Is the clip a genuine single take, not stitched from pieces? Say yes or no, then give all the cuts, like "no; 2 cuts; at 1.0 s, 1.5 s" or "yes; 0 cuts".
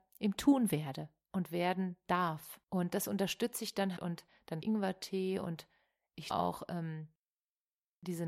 no; 4 cuts; at 2.6 s, 4.0 s, 4.6 s, 6.3 s